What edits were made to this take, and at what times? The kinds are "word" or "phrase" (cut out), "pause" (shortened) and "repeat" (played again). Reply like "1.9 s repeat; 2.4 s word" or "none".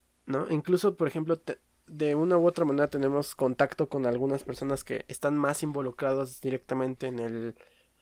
none